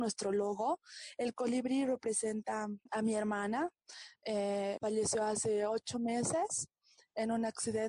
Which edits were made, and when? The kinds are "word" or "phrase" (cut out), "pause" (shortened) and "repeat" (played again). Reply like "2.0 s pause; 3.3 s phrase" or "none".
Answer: 2.9 s pause; 4.8 s phrase

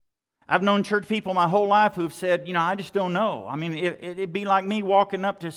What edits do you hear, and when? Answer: none

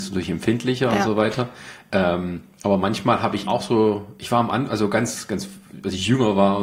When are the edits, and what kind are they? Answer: 3.5 s word

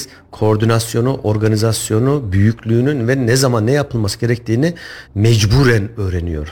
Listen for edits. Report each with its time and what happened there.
5.1 s pause

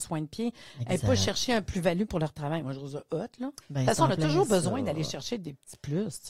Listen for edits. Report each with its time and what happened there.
none

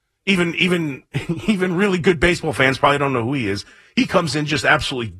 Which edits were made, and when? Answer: none

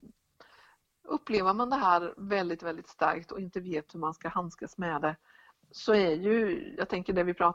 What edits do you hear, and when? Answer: none

